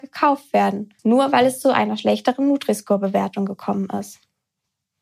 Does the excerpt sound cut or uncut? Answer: cut